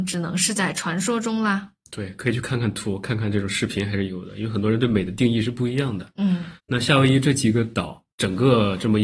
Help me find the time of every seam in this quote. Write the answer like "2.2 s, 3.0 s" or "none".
6.6 s, 8.1 s

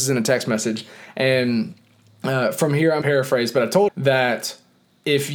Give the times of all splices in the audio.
3.0 s, 3.9 s

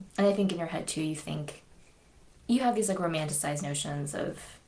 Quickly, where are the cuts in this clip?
none

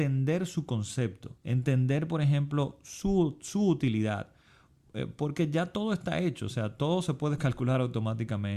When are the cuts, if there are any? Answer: 1.4 s

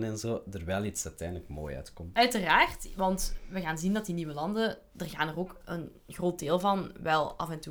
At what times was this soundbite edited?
none

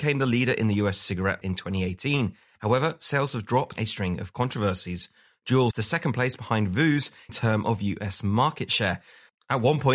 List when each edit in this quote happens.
1.4 s, 3.8 s, 5.7 s, 7.3 s

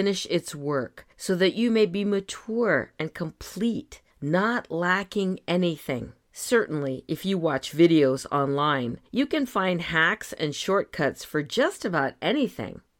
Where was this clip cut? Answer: 1.1 s, 4.1 s, 6.2 s, 9.1 s

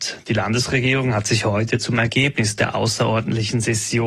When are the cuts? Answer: none

